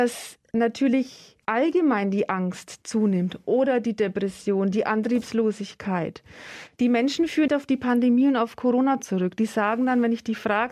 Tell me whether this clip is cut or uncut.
cut